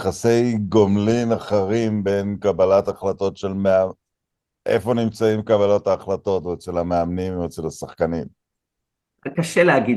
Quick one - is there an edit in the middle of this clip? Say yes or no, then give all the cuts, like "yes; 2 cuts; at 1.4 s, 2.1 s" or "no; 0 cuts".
no; 0 cuts